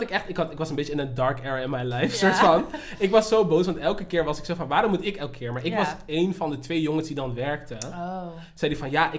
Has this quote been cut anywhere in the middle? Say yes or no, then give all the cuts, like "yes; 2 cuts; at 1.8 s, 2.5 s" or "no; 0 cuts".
no; 0 cuts